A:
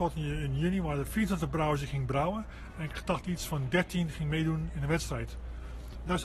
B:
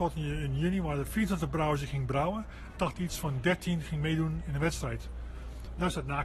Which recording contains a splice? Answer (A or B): B